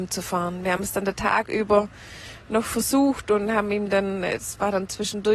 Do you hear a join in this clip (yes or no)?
no